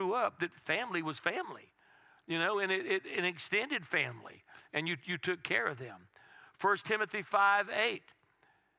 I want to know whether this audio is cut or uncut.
uncut